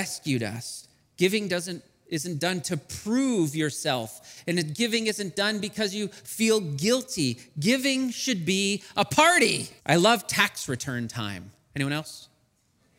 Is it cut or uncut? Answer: cut